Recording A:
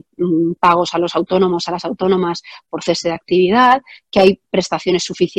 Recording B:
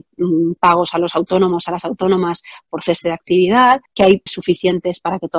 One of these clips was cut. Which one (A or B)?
B